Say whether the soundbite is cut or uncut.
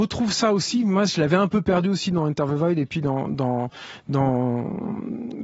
uncut